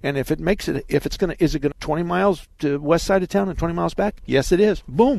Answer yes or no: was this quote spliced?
yes